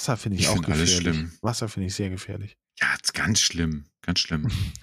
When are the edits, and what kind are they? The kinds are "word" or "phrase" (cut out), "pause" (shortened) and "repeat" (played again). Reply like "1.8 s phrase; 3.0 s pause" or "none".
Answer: none